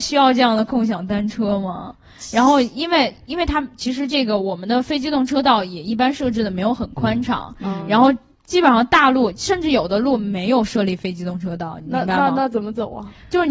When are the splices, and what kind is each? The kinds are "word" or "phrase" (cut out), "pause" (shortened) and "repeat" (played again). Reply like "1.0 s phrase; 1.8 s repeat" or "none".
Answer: none